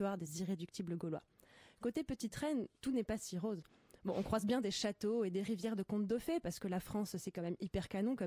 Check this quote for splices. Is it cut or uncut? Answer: uncut